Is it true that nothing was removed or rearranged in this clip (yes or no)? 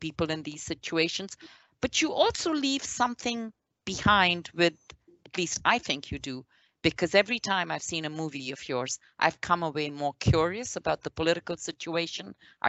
yes